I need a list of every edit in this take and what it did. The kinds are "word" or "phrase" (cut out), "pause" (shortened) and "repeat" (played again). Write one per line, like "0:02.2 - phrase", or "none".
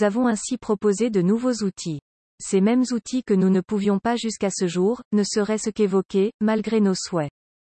none